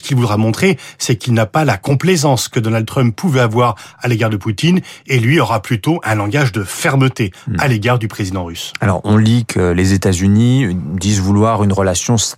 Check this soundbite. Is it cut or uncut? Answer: uncut